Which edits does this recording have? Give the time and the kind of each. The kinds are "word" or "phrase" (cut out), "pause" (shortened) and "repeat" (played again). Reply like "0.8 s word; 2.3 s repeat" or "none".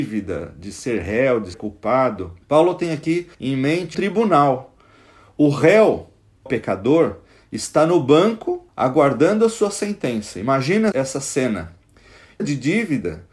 1.5 s word; 2.4 s pause; 3.3 s pause; 3.9 s word; 6.5 s phrase; 8.7 s pause; 10.9 s word; 12.4 s phrase